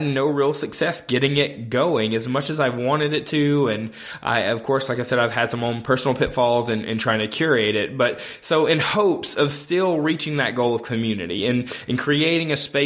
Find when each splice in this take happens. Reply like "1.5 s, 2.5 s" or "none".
none

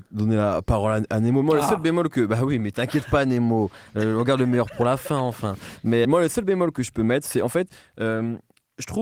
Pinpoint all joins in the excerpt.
6.0 s

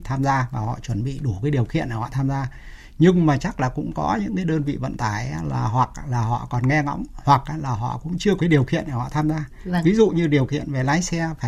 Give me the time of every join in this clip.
8.4 s

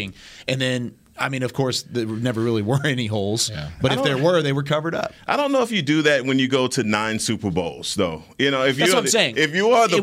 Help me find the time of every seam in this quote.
none

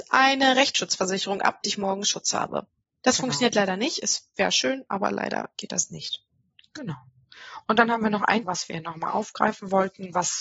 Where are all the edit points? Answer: 1.6 s, 5.5 s, 8.4 s

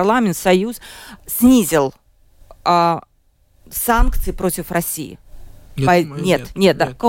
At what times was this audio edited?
none

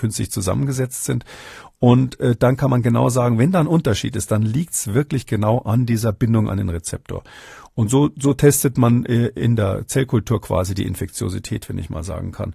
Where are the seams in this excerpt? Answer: none

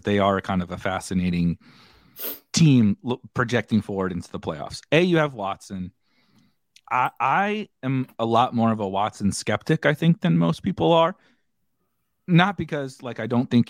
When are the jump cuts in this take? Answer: none

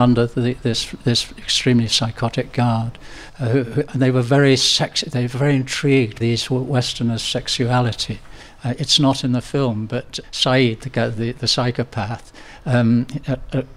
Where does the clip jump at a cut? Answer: 6.2 s, 10.2 s

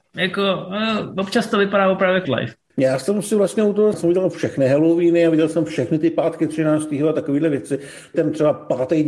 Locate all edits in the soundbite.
2.2 s, 2.7 s, 3.9 s, 8.1 s

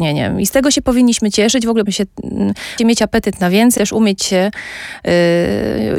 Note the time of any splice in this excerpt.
1.9 s, 2.8 s, 3.8 s, 4.2 s

